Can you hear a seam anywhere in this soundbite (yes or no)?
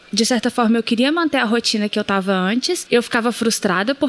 no